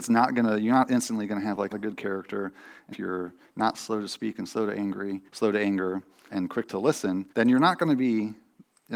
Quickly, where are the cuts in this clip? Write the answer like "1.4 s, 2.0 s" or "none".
1.7 s, 2.9 s, 5.3 s, 6.3 s, 7.3 s